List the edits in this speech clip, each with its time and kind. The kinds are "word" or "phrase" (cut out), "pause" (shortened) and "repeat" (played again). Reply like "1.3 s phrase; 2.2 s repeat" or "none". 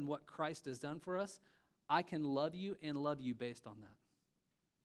none